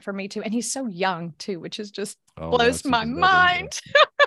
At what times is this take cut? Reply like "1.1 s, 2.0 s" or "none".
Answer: none